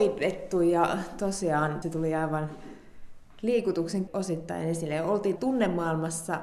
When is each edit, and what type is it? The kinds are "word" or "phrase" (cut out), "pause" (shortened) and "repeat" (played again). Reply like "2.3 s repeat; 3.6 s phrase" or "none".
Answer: 1.8 s word; 4.1 s word; 5.4 s word